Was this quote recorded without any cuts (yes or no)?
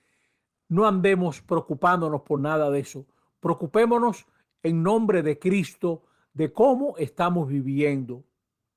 yes